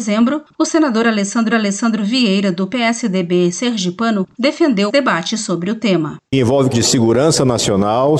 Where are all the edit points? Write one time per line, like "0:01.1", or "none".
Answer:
0:01.5
0:04.9
0:06.7